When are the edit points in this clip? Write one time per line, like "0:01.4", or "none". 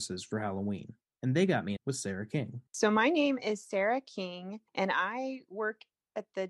0:01.0
0:01.8
0:02.7
0:04.7